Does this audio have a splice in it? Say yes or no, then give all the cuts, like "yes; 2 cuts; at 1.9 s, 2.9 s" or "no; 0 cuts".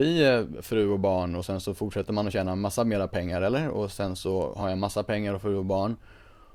no; 0 cuts